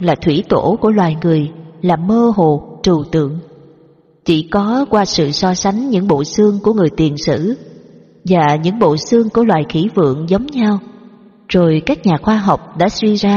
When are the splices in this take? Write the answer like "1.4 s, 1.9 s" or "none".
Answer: none